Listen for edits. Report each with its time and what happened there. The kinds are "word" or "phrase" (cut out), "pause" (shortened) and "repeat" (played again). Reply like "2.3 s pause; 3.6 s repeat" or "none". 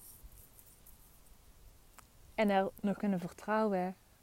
3.0 s phrase